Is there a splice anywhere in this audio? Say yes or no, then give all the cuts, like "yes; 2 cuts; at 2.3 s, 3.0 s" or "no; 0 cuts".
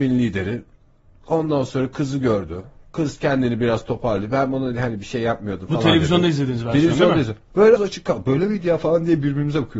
yes; 1 cut; at 7.8 s